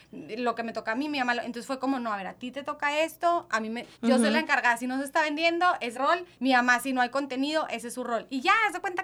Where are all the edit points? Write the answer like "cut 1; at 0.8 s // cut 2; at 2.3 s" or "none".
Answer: cut 1; at 3.9 s // cut 2; at 5.9 s // cut 3; at 6.3 s